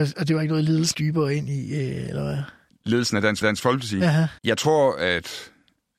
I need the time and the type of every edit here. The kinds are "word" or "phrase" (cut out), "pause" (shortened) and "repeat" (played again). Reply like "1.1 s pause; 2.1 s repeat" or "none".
0.9 s word; 2.7 s pause; 3.4 s repeat; 4.4 s pause